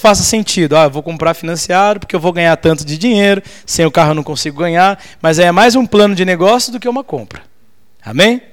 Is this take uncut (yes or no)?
yes